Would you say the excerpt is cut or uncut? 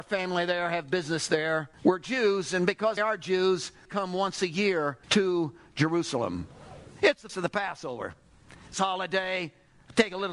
cut